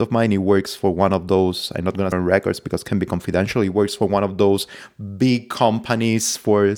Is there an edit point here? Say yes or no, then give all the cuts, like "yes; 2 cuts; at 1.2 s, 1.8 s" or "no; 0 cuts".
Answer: yes; 1 cut; at 2.1 s